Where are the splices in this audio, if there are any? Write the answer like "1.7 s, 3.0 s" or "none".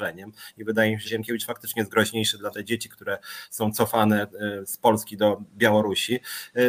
1.1 s, 2.5 s